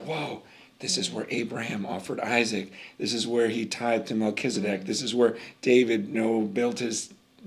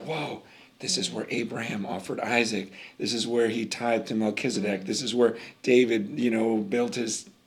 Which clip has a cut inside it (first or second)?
first